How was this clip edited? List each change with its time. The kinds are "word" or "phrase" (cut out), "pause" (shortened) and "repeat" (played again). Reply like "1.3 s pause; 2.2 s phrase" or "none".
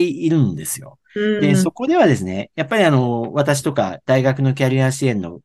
none